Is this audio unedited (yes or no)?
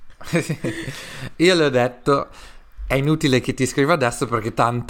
no